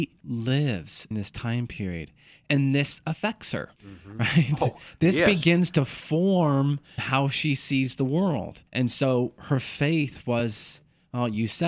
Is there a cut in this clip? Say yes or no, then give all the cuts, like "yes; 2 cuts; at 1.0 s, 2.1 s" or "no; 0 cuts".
yes; 4 cuts; at 1.1 s, 3.8 s, 7.0 s, 8.7 s